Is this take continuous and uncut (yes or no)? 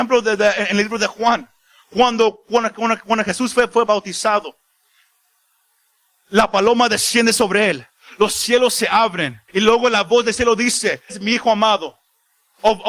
no